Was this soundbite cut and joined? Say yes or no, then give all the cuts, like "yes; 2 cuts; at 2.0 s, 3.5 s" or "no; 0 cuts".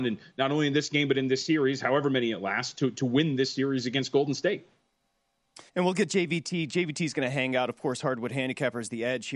yes; 1 cut; at 5.7 s